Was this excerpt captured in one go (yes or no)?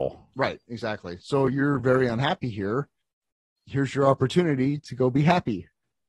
yes